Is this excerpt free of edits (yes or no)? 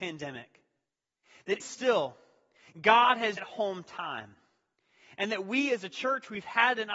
no